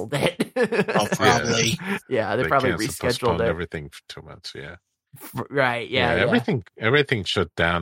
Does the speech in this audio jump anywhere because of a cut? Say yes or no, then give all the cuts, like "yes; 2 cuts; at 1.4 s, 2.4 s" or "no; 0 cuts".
no; 0 cuts